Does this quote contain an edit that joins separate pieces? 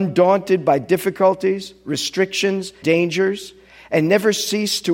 yes; 1 cut; at 2.8 s

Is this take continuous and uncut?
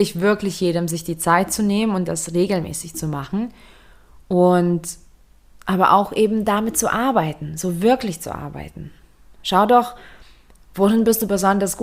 yes; 0 cuts

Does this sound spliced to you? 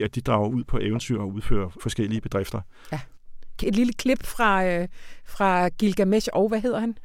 yes; 2 cuts; at 1.8 s, 3.6 s

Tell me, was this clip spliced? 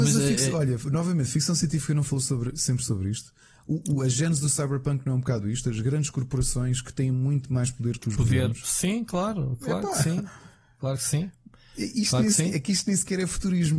no; 0 cuts

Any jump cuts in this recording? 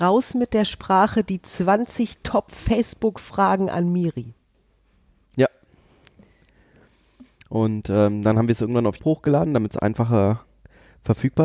yes; 1 cut; at 9.0 s

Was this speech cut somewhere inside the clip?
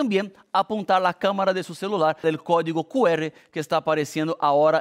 yes; 1 cut; at 2.2 s

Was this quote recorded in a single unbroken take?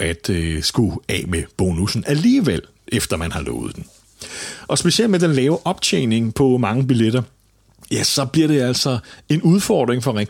yes; 0 cuts

